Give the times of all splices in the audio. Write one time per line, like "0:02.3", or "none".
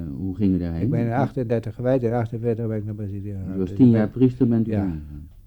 none